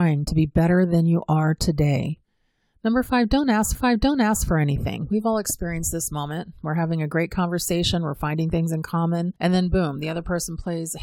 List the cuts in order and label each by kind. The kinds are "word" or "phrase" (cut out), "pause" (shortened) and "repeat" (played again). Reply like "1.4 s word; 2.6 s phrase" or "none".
3.7 s repeat; 9.4 s pause